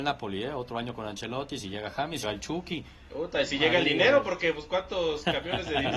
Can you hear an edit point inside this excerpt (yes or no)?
yes